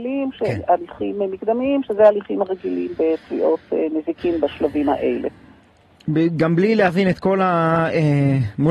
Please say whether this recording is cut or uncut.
uncut